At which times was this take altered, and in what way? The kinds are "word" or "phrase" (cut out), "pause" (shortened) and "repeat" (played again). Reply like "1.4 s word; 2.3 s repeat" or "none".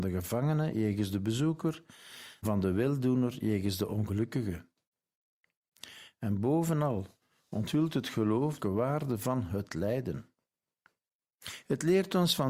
2.4 s word; 8.6 s phrase